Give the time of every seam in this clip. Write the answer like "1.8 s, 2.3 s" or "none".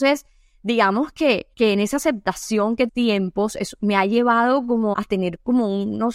1.5 s, 2.9 s, 4.9 s